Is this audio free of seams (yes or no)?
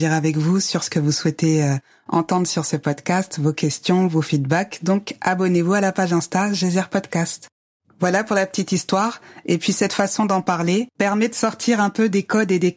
yes